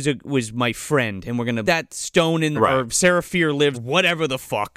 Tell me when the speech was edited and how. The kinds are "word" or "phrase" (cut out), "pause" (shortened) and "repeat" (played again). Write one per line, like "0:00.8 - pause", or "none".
0:01.6 - word
0:02.5 - word
0:03.7 - word

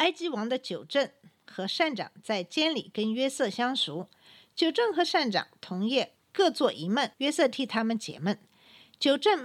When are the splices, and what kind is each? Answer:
0:07.1 - pause

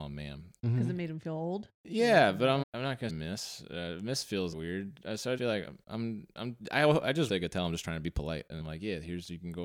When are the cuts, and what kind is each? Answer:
0:02.6 - word
0:03.1 - word
0:04.5 - word
0:05.4 - word
0:07.3 - word
0:08.6 - word

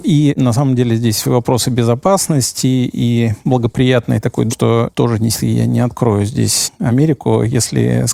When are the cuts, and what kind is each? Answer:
0:01.2 - word
0:04.5 - phrase
0:05.3 - word

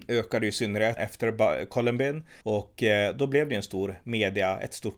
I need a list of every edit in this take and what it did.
0:01.0 - word
0:02.4 - pause

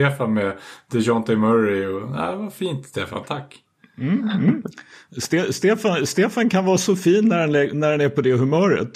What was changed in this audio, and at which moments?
none

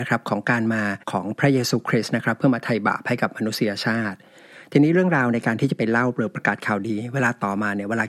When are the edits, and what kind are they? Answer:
0:01.0 - pause

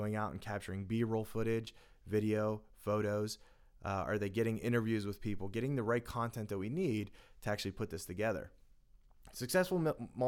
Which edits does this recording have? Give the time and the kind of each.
none

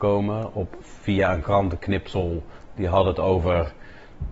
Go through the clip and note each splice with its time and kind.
none

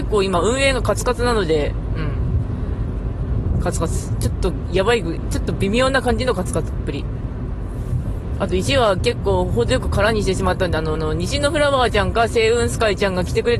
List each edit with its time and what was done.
0:11.0 - repeat

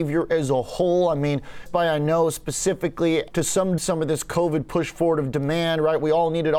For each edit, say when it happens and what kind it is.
0:01.7 - word
0:03.3 - word
0:03.8 - word

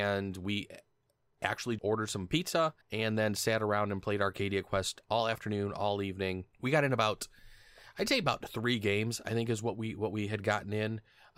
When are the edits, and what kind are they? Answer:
0:01.8 - word
0:02.8 - pause
0:06.5 - pause

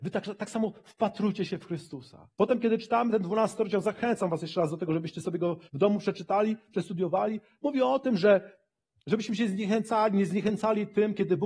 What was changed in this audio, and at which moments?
0:02.3 - pause
0:05.7 - pause

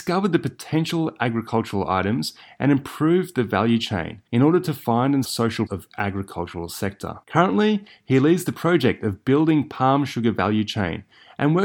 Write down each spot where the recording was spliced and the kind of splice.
0:04.3 - pause
0:05.2 - word
0:05.7 - word
0:07.2 - pause

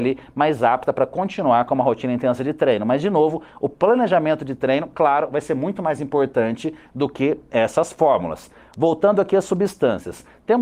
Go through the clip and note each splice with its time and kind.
none

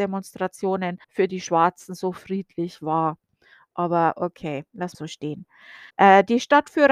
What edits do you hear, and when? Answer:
0:01.0 - pause
0:04.9 - phrase
0:05.9 - pause

